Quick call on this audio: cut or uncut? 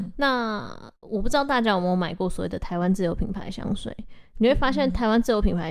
uncut